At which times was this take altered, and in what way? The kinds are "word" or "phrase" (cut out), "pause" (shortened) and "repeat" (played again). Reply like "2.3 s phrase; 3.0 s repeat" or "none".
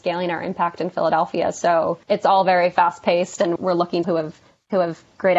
2.0 s pause; 3.6 s word; 4.0 s phrase